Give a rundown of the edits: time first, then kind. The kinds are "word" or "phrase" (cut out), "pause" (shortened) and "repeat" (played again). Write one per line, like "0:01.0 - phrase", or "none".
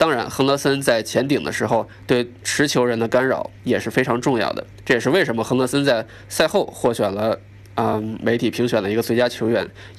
none